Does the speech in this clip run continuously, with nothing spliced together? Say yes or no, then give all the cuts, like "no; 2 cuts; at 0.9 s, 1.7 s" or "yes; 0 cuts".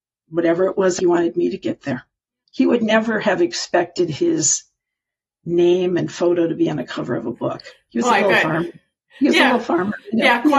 no; 2 cuts; at 1.0 s, 2.2 s